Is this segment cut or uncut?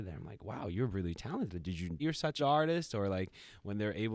cut